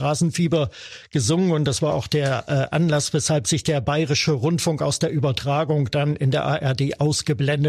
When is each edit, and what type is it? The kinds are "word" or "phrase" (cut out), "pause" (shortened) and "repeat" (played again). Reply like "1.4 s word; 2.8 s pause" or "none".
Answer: none